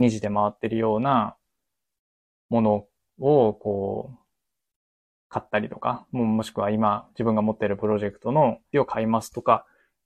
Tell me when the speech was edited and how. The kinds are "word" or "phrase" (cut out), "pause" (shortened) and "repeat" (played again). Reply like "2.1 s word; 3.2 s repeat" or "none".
8.7 s word